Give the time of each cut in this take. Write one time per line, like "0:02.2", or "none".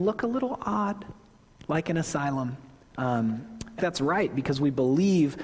0:03.8

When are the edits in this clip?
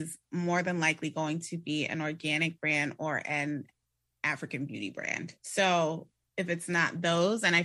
0:05.4

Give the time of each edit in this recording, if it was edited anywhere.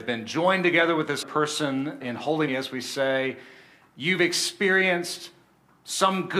0:01.2
0:02.0
0:02.5

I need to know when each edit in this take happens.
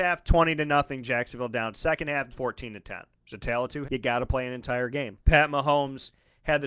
0:02.3
0:03.2
0:03.8
0:05.2

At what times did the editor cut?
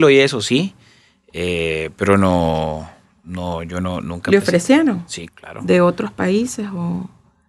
0:05.3

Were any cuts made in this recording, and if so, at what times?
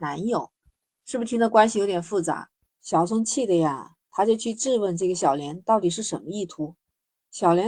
0:02.7

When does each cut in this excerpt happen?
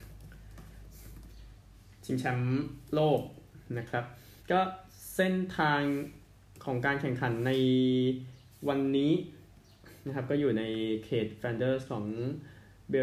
0:04.4

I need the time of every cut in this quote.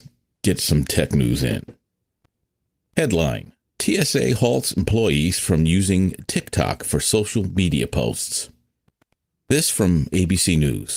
none

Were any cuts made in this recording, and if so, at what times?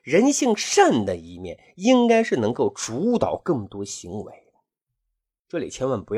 none

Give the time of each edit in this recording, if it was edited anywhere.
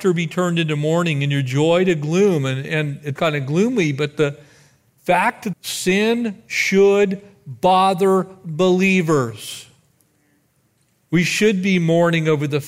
0:03.2
0:05.5

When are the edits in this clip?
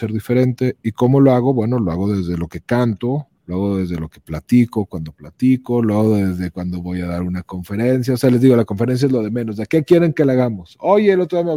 0:03.4

